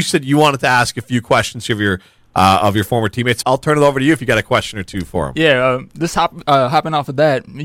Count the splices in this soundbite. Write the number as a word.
one